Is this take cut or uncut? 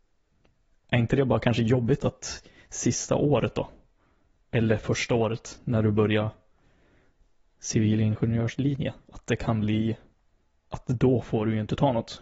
uncut